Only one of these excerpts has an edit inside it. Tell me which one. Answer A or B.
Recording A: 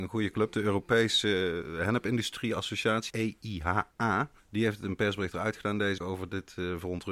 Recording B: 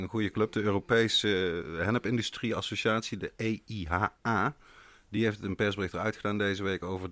A